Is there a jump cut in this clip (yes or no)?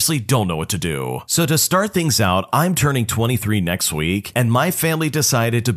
no